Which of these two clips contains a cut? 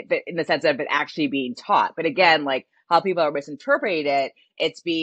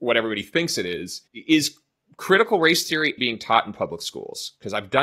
second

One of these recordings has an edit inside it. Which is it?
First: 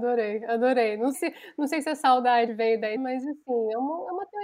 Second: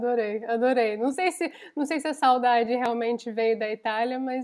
first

